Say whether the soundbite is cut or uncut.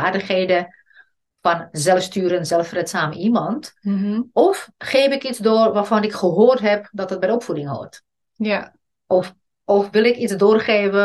uncut